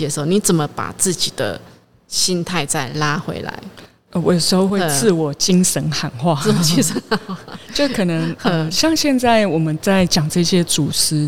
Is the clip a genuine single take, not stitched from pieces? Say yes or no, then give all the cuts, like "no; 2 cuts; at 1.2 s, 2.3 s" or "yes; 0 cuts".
yes; 0 cuts